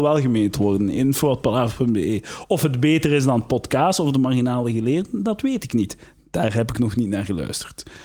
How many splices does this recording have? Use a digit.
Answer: 0